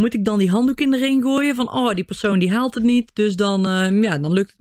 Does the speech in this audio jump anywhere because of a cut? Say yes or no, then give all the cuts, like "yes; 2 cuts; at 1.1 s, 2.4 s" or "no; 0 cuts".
no; 0 cuts